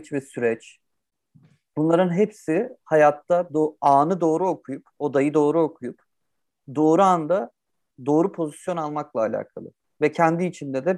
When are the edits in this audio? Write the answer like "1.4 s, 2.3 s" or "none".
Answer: none